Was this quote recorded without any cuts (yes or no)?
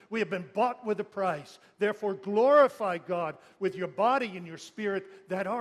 yes